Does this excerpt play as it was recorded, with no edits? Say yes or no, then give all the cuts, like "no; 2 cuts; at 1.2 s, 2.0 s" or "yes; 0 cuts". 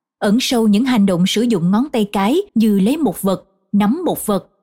no; 1 cut; at 2.5 s